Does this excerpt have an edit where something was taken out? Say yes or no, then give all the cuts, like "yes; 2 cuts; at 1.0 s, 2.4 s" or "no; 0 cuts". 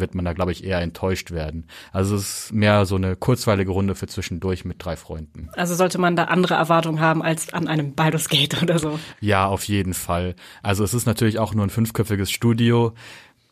no; 0 cuts